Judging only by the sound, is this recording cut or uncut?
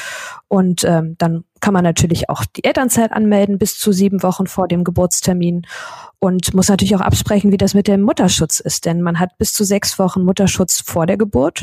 uncut